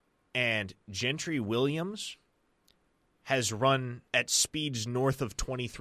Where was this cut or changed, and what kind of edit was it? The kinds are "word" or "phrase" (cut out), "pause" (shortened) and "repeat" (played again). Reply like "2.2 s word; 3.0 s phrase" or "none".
4.1 s pause